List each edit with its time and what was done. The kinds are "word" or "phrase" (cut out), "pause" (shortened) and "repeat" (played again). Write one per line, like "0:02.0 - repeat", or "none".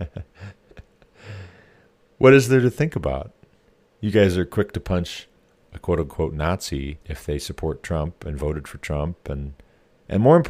0:07.0 - pause